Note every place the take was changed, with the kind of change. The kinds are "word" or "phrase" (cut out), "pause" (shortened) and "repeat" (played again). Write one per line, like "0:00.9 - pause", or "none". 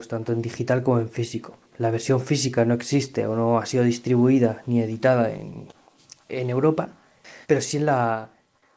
0:07.4 - pause